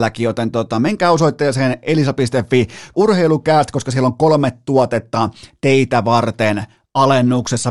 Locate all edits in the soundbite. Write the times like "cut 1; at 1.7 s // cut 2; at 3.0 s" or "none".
cut 1; at 2.9 s